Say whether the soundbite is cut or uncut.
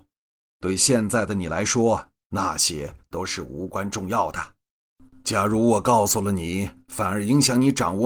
uncut